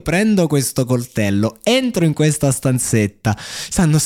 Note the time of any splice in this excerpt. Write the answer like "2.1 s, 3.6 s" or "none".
none

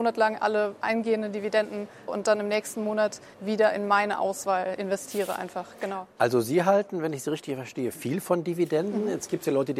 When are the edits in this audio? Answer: 2.1 s, 3.3 s

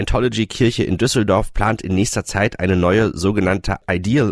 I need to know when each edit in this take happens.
none

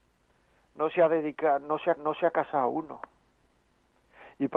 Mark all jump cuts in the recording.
2.0 s

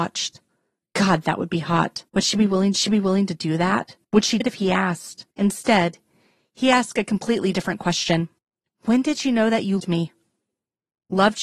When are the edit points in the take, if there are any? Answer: 2.1 s, 2.7 s, 4.0 s, 4.4 s, 5.3 s, 8.4 s, 9.8 s

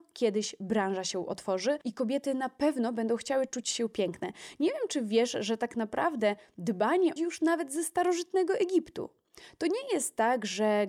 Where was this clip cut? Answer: 7.2 s

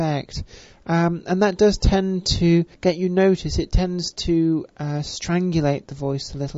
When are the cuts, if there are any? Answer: 2.7 s

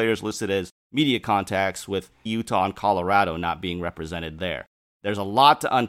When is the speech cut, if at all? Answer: 2.3 s

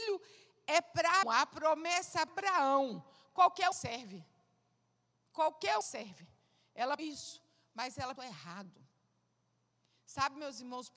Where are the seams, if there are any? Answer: 1.2 s, 2.3 s, 3.7 s, 5.8 s, 7.0 s, 8.2 s

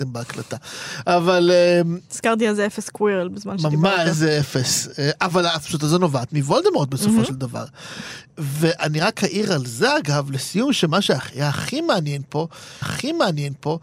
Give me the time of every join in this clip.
12.8 s

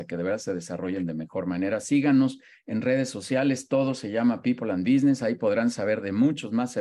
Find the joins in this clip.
none

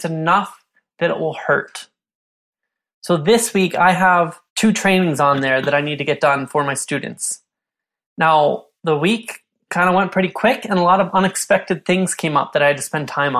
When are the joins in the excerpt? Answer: 4.5 s

